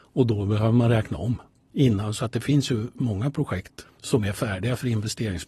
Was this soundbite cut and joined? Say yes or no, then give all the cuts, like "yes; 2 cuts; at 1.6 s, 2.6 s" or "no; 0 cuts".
no; 0 cuts